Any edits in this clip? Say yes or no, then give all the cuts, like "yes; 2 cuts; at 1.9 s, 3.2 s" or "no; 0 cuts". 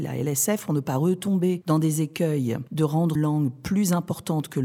yes; 1 cut; at 3.2 s